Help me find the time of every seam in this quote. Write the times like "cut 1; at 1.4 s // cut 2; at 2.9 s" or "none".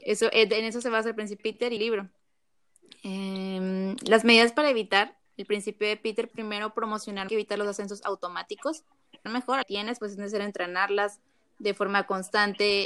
cut 1; at 1.4 s // cut 2; at 1.8 s // cut 3; at 5.3 s // cut 4; at 6.3 s // cut 5; at 7.3 s // cut 6; at 9.3 s // cut 7; at 9.6 s